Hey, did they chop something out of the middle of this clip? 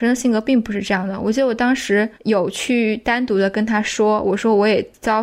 yes; 1 cut; at 2.1 s

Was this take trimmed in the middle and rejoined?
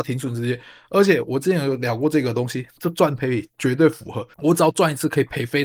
yes; 1 cut; at 4.3 s

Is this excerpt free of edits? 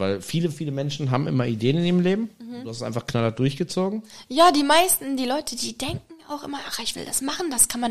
yes; 0 cuts

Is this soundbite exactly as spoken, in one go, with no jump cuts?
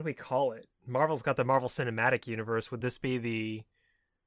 yes; 0 cuts

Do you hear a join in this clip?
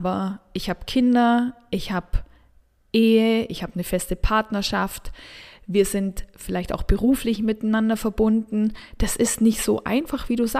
no; 0 cuts

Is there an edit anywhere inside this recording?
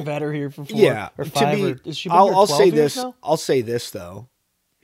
no; 0 cuts

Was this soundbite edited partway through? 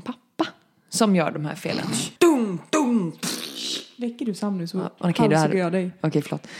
yes; 1 cut; at 2.2 s

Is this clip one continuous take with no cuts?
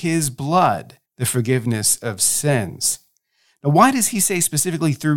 no; 1 cut; at 1.1 s

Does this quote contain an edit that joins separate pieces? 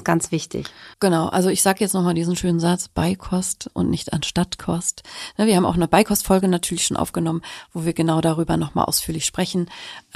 yes; 1 cut; at 0.9 s

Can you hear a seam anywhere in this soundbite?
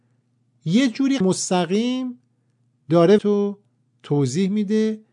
yes; 2 cuts; at 1.2 s, 3.2 s

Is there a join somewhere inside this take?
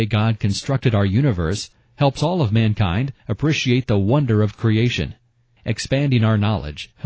no; 0 cuts

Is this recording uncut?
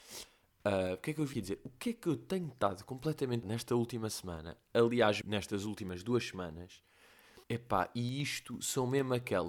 no; 4 cuts; at 1.3 s, 3.4 s, 5.2 s, 7.4 s

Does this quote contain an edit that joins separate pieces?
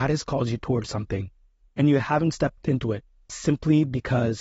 no; 0 cuts

